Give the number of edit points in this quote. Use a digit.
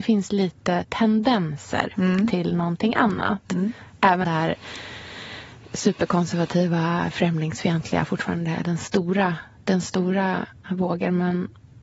3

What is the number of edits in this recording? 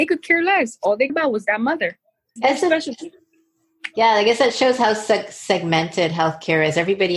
2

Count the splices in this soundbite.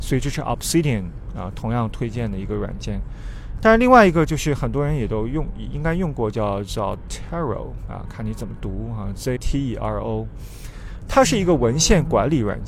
1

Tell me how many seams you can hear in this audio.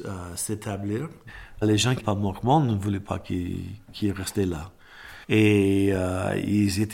3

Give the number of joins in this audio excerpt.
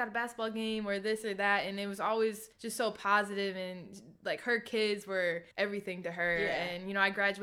2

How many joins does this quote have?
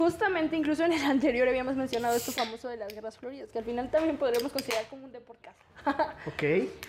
1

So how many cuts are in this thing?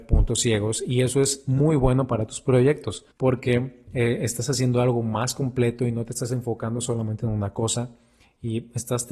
1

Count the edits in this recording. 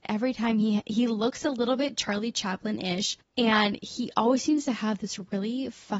1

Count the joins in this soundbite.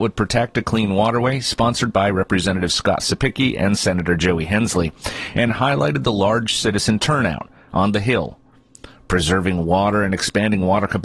0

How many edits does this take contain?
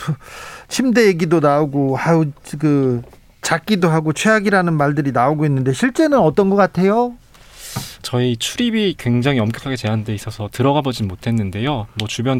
0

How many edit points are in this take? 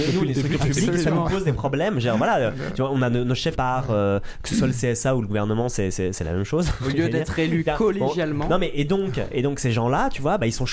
1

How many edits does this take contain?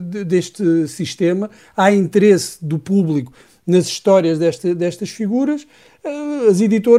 0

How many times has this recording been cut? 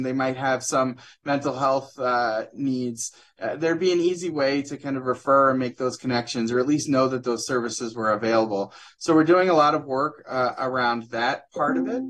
0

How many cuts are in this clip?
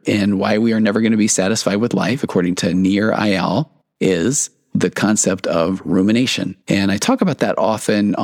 2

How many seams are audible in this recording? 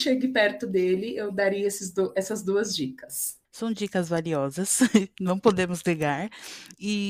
1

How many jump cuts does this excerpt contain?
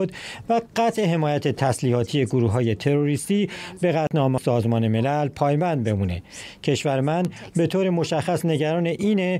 1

